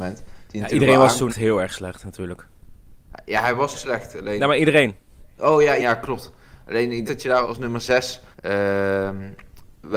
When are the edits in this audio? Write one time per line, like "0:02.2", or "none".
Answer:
0:01.3
0:03.7
0:05.8
0:07.1
0:07.4
0:08.3